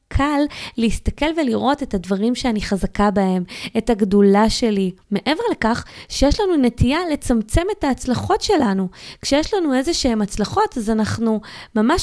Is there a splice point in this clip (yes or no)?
yes